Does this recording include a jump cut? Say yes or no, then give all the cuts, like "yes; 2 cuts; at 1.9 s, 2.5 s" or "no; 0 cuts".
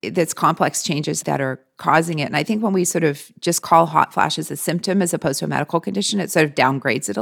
no; 0 cuts